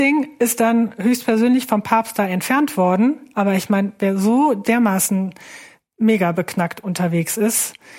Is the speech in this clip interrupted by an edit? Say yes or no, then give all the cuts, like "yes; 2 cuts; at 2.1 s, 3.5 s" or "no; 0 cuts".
no; 0 cuts